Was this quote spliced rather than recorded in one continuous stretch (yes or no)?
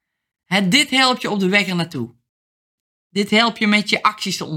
no